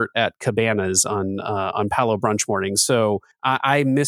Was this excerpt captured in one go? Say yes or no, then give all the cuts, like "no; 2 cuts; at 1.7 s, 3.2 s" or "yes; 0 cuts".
yes; 0 cuts